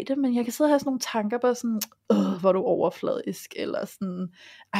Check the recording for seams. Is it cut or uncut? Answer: uncut